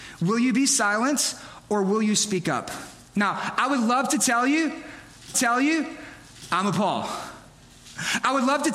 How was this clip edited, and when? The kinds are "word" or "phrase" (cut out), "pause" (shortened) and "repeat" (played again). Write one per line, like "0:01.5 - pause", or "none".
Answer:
0:05.3 - repeat